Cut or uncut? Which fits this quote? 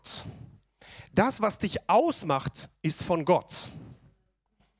uncut